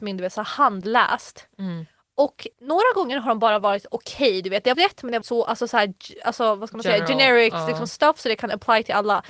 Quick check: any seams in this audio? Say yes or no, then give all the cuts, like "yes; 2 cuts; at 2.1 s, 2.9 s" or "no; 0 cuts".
yes; 3 cuts; at 2.5 s, 4.7 s, 5.2 s